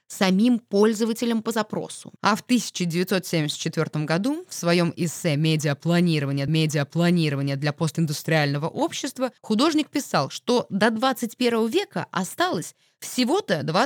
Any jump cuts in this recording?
yes; 3 cuts; at 2.2 s, 6.5 s, 9.4 s

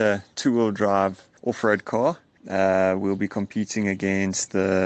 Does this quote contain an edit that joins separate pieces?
no; 0 cuts

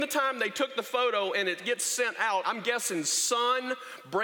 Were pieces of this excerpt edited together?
yes; 1 cut; at 2.4 s

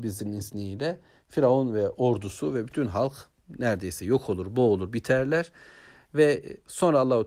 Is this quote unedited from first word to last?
yes; 0 cuts

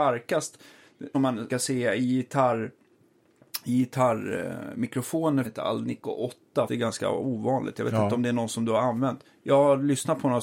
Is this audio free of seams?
no; 4 cuts; at 1.1 s, 1.5 s, 5.4 s, 6.7 s

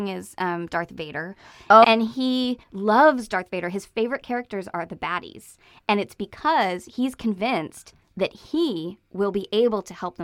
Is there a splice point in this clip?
yes; 2 cuts; at 1.8 s, 2.6 s

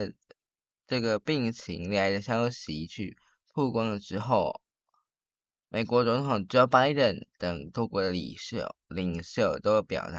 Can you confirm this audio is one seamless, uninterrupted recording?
yes; 0 cuts

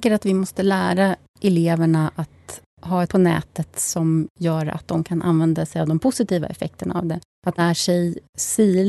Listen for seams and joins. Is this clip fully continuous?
no; 2 cuts; at 3.1 s, 7.6 s

